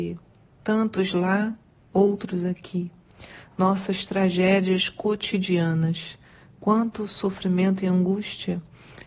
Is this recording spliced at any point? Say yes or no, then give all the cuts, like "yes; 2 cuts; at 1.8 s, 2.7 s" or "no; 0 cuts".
no; 0 cuts